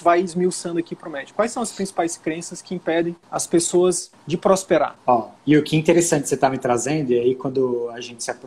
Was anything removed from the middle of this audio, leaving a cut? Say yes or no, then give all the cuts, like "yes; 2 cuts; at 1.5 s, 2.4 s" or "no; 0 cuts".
no; 0 cuts